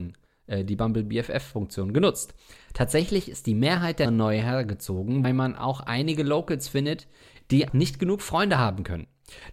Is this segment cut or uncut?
cut